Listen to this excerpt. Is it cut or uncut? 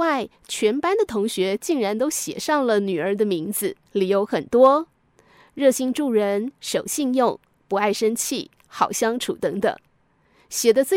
cut